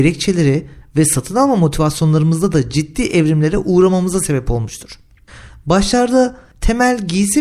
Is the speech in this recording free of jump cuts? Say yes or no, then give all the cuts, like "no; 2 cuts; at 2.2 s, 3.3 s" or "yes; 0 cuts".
yes; 0 cuts